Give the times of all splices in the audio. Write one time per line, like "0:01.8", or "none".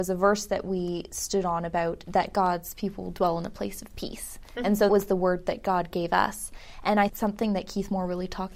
0:02.0
0:04.9
0:07.1